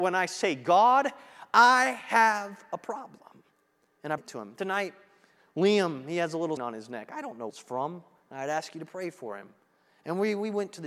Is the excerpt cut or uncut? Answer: cut